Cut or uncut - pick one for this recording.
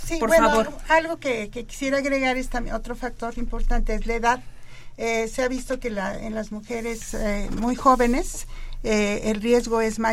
uncut